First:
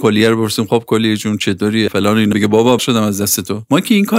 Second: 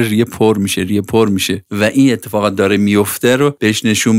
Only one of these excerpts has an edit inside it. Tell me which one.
first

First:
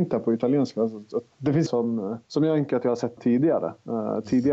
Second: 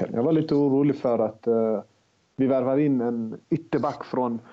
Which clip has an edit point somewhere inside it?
first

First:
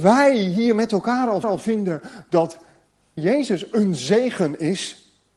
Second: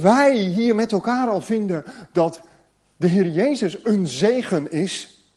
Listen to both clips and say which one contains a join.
first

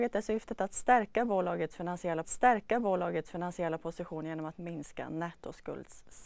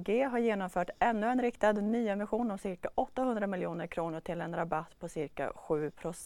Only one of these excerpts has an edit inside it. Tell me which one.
first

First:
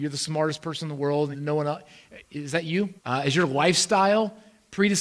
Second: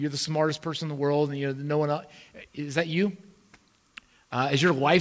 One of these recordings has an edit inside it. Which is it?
first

